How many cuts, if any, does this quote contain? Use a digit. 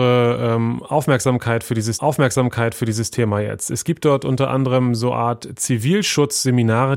1